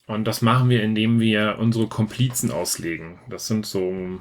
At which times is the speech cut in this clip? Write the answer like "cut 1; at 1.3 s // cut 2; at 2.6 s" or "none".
none